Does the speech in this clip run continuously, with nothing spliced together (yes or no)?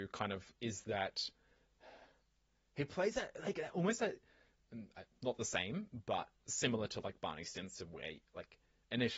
yes